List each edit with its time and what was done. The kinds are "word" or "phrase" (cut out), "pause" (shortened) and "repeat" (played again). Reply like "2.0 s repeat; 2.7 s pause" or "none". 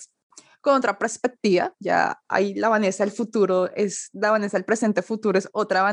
none